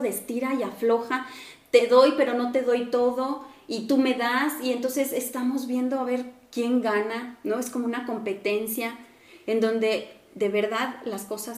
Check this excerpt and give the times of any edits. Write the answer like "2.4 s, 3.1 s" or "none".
none

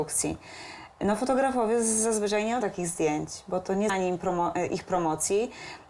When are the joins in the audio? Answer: 2.6 s, 3.9 s

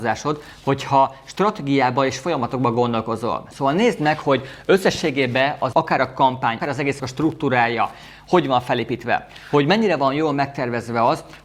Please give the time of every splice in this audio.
5.7 s, 6.6 s, 7.0 s

